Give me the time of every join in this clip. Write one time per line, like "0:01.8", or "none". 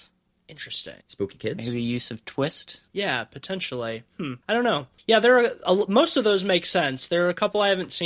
0:01.0
0:02.9
0:04.4
0:05.0